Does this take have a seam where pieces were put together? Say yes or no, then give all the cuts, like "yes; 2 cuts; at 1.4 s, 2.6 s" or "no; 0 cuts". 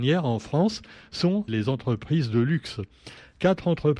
yes; 1 cut; at 1.5 s